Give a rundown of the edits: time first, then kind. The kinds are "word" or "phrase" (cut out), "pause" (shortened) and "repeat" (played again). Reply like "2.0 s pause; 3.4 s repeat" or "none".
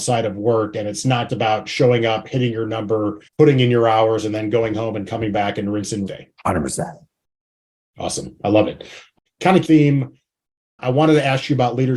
1.3 s word; 3.3 s pause; 6.1 s phrase; 6.4 s pause; 9.3 s pause; 9.6 s phrase